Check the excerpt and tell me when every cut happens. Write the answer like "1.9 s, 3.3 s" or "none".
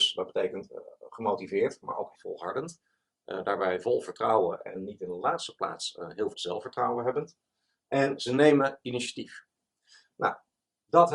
2.1 s, 6.3 s